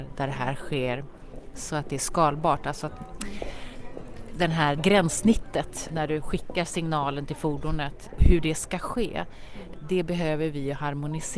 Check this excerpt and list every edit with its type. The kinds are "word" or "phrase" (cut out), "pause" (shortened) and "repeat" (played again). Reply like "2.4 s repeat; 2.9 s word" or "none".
4.8 s word; 5.9 s word; 8.2 s word